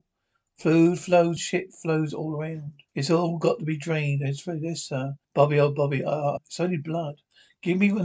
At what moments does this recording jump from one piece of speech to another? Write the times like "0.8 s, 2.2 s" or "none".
1.4 s, 2.1 s, 2.9 s, 5.2 s, 6.4 s